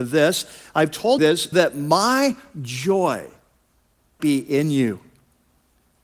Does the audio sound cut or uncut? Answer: cut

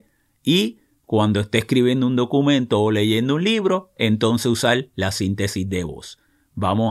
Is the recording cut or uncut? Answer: uncut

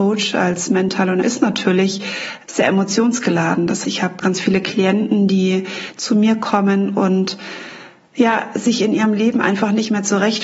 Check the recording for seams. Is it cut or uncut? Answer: cut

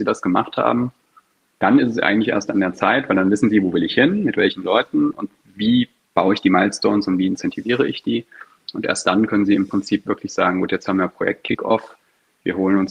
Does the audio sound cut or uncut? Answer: uncut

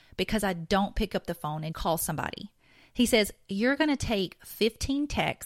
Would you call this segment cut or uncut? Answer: cut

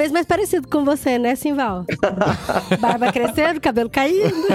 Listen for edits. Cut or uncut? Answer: uncut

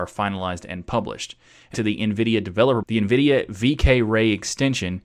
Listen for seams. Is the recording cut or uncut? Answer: cut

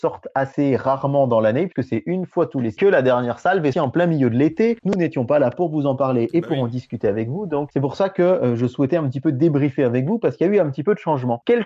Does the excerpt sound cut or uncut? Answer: cut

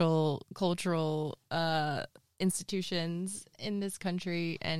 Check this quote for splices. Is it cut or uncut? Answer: uncut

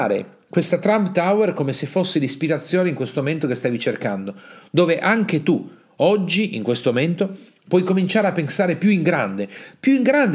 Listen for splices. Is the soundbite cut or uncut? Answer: uncut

